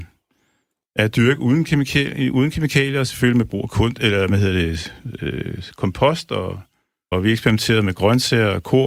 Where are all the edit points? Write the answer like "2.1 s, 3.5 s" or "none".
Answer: 7.1 s